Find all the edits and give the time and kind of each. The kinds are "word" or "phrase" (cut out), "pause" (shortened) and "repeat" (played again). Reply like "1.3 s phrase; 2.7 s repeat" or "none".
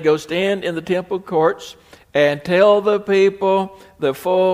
none